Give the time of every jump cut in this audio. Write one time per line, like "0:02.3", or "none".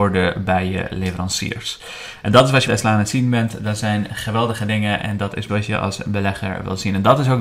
0:02.7
0:05.5